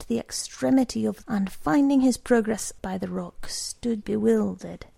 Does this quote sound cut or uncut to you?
cut